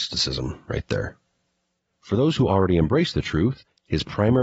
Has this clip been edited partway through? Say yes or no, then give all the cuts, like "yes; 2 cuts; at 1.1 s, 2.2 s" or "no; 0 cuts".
no; 0 cuts